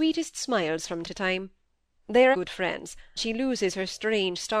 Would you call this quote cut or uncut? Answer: cut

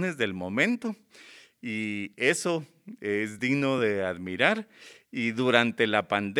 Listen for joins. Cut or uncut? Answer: uncut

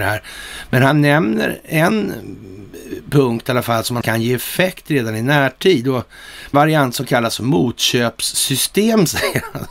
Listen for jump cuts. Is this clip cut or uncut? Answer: cut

